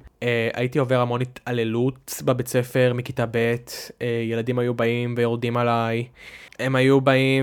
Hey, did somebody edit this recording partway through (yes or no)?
no